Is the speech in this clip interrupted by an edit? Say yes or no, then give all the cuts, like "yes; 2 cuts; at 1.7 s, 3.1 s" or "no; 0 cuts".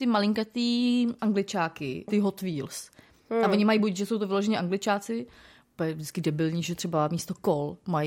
no; 0 cuts